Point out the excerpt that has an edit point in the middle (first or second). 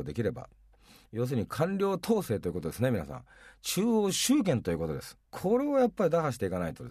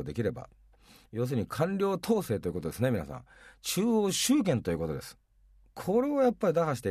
first